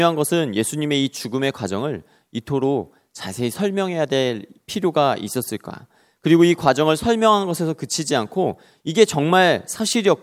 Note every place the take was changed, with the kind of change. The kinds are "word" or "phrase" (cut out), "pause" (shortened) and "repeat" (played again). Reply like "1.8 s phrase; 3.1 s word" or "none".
none